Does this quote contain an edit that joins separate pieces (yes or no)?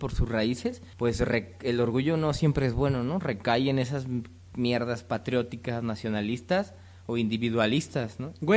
yes